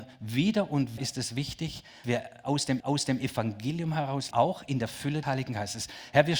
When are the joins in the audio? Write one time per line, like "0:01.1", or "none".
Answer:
0:01.0
0:02.0
0:02.8
0:04.3
0:05.2